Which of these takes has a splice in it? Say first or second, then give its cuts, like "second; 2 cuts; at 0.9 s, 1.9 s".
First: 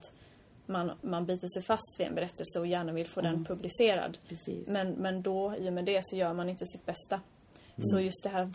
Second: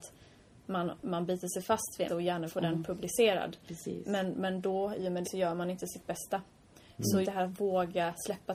second; 4 cuts; at 2.1 s, 2.5 s, 5.2 s, 7.2 s